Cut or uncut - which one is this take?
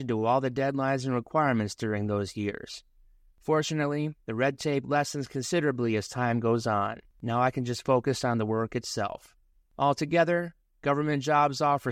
cut